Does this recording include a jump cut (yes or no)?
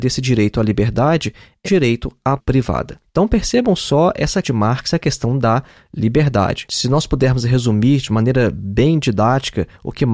yes